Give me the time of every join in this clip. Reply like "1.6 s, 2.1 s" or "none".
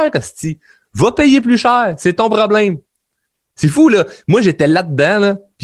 none